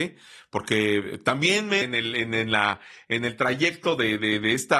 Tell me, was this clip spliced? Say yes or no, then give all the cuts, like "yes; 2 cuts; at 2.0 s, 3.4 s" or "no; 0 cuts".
yes; 1 cut; at 1.8 s